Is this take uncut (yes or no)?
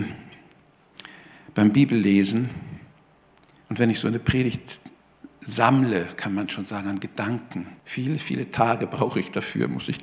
no